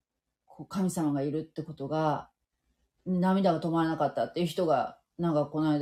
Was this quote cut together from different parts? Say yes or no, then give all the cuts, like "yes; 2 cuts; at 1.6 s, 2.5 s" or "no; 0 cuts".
yes; 1 cut; at 3.0 s